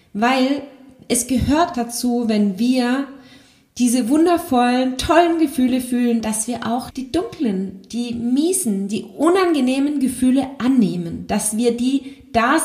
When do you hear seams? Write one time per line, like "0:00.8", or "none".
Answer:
0:01.7
0:06.2
0:06.9